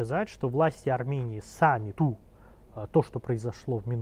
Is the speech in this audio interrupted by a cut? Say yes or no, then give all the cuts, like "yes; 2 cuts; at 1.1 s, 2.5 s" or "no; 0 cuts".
yes; 1 cut; at 1.9 s